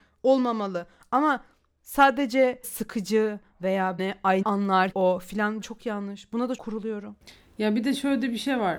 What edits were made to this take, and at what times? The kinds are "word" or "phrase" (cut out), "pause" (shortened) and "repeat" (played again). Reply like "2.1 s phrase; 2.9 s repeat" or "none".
2.6 s word; 4.0 s word; 4.4 s word; 4.9 s word; 5.6 s word; 6.6 s word